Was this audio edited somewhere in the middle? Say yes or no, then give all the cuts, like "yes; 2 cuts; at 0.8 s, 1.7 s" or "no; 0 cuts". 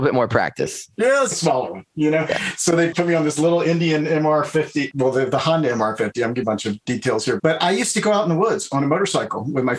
yes; 3 cuts; at 1.3 s, 6.4 s, 7.4 s